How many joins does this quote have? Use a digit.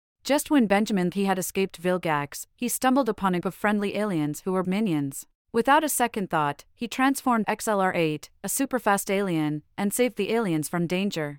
5